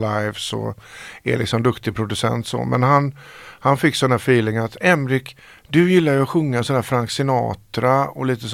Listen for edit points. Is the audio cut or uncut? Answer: uncut